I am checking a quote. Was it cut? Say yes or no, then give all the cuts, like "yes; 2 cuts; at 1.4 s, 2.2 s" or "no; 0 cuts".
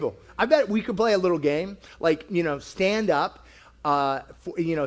no; 0 cuts